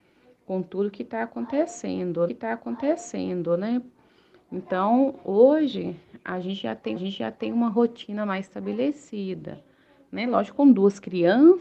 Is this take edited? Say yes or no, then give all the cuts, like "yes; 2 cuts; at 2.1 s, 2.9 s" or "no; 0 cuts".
yes; 2 cuts; at 2.3 s, 7.0 s